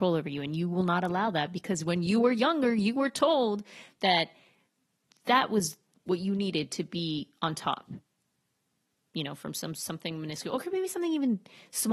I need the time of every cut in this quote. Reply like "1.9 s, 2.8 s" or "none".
none